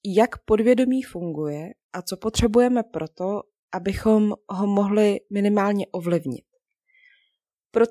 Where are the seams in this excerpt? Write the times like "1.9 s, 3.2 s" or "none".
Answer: none